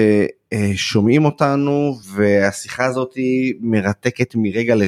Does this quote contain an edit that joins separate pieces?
yes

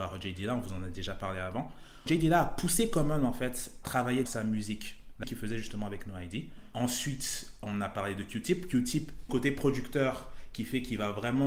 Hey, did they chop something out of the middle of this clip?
yes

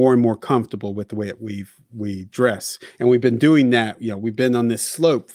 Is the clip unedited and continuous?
yes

